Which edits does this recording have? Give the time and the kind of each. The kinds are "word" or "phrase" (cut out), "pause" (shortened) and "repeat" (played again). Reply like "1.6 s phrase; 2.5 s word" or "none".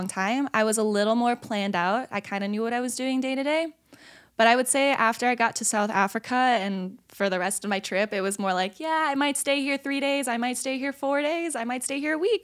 none